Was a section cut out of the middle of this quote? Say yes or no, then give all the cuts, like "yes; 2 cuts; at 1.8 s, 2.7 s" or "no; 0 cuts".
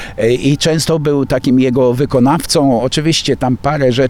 no; 0 cuts